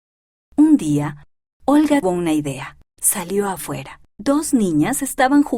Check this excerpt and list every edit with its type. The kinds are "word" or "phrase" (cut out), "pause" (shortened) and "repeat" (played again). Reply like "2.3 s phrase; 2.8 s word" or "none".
2.0 s word; 2.8 s pause; 4.1 s pause